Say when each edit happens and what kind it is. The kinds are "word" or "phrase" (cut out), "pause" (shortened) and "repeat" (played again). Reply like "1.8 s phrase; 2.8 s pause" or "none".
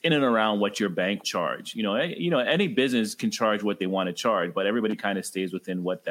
1.2 s word